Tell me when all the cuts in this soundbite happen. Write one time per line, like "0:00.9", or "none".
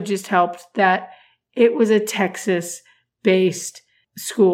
none